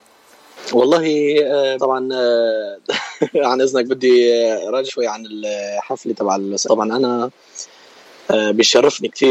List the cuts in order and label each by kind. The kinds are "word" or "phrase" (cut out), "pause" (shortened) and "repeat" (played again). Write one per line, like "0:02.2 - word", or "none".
0:01.8 - word
0:03.9 - word
0:04.9 - word
0:06.6 - word